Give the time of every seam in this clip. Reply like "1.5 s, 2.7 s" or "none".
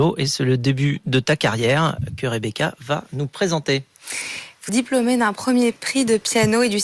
4.7 s